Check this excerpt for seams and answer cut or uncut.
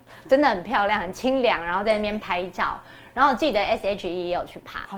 uncut